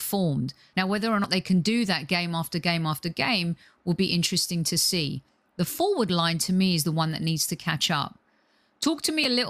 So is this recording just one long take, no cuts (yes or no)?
yes